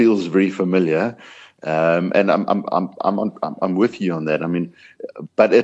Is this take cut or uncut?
uncut